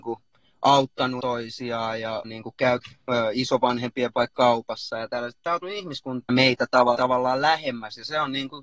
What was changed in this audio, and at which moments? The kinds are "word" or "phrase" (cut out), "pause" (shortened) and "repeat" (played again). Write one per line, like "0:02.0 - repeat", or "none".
0:01.2 - word
0:02.2 - word
0:02.8 - word
0:04.1 - word
0:05.6 - word
0:06.3 - word
0:06.9 - word